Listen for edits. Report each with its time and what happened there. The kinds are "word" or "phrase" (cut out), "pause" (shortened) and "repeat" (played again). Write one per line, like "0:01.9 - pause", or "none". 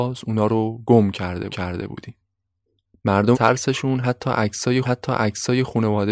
0:01.5 - repeat
0:03.3 - phrase
0:04.8 - repeat